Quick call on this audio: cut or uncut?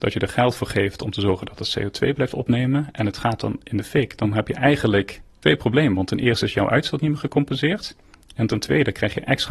uncut